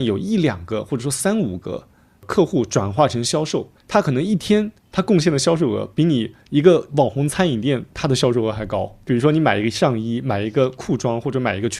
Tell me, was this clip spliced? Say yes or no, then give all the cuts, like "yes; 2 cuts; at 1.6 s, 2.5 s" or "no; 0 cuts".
yes; 2 cuts; at 3.8 s, 4.8 s